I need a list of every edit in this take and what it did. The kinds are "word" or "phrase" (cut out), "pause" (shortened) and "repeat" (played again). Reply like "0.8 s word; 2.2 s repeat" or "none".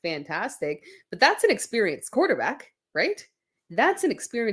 none